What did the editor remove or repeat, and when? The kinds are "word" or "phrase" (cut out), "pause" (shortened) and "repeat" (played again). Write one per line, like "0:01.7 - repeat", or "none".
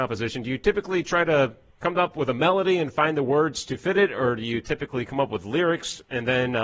none

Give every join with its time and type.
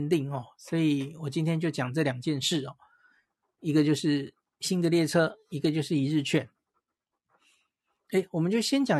0:04.5 - pause

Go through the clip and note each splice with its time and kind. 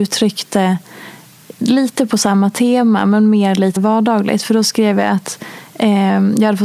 0:03.8 - word

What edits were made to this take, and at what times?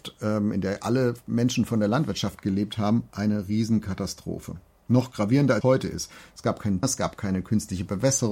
0:05.6 - word
0:06.8 - word

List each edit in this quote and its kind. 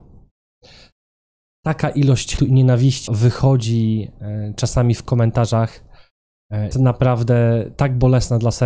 0:02.4 - word
0:03.1 - word
0:06.7 - word

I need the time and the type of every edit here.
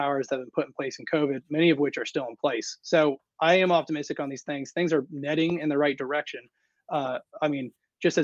none

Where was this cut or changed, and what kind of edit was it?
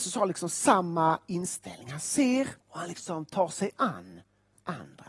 0:02.6 - pause

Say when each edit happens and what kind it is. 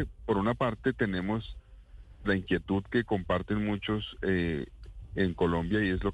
0:02.2 - word

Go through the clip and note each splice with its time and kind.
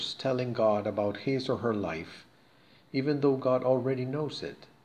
none

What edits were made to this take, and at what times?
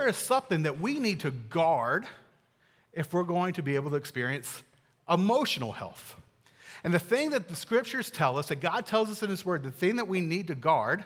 none

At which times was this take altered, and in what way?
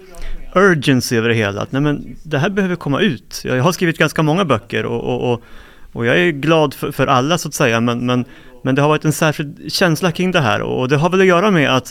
none

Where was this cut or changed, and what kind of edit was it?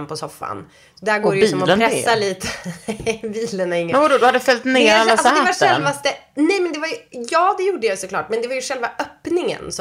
none

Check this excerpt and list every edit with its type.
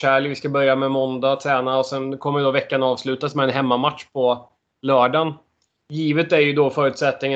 none

